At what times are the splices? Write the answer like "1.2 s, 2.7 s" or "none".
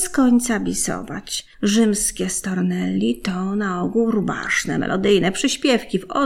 1.5 s